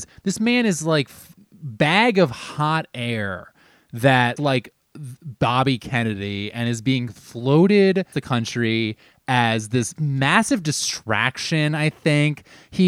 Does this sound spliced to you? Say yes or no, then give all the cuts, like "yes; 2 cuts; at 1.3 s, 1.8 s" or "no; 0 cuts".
yes; 4 cuts; at 1.4 s, 4.4 s, 8.1 s, 10.0 s